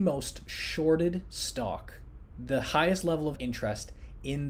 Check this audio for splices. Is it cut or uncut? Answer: cut